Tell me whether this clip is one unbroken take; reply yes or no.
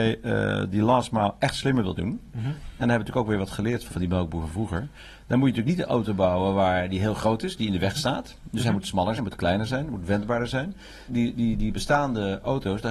no